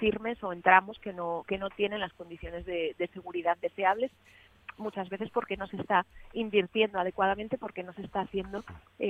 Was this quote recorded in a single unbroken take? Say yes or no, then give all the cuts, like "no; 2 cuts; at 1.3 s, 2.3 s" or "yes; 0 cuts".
yes; 0 cuts